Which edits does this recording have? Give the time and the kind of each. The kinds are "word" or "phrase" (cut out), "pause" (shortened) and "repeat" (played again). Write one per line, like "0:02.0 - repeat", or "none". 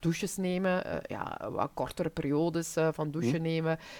none

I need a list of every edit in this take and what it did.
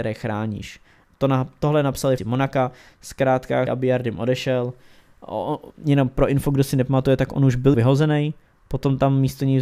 0:02.2 - word
0:03.7 - word
0:07.7 - word

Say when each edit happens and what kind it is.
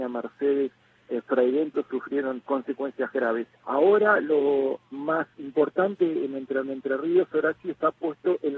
0:02.4 - word
0:03.5 - pause
0:05.3 - word
0:06.6 - repeat

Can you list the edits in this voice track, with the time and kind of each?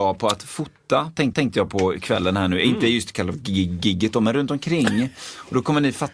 0:01.3 - repeat

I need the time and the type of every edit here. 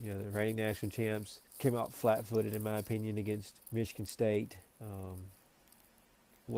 0:01.5 - pause
0:03.6 - pause
0:04.7 - pause

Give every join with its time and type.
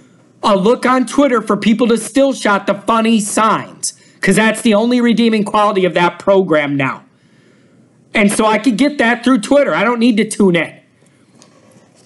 none

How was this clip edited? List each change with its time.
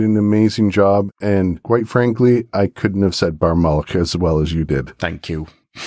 none

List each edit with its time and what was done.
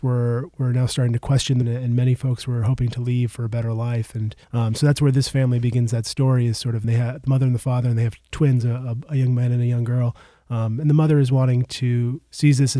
0:01.6 - word
0:04.4 - pause
0:06.8 - phrase
0:08.3 - word

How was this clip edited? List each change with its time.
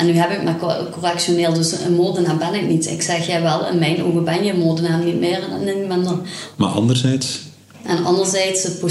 none

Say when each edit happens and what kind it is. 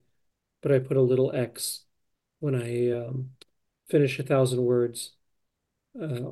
none

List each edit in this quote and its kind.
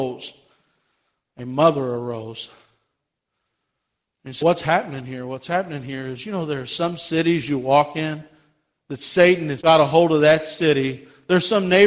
0:04.4 - word
0:09.6 - word

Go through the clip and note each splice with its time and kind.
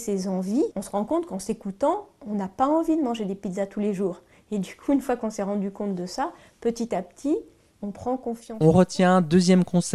none

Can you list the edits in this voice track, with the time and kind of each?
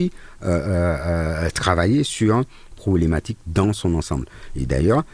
0:02.7 - word

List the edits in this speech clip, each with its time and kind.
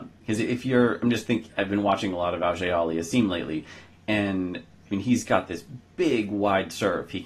none

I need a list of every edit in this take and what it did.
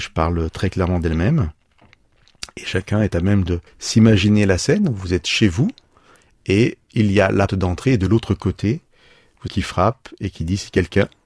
0:03.7 - pause
0:07.5 - word
0:09.5 - phrase

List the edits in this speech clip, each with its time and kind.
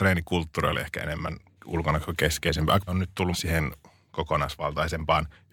0:01.6 - word
0:02.9 - word
0:03.3 - word

